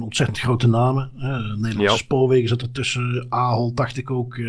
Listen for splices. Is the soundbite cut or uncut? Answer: uncut